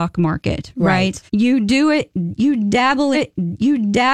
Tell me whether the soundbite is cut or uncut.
cut